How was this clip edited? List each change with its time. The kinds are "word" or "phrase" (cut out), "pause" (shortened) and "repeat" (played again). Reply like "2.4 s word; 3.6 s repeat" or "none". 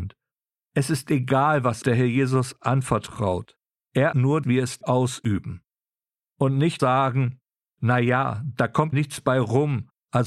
1.8 s word; 4.1 s word; 4.4 s word; 4.8 s word; 6.8 s word; 8.9 s word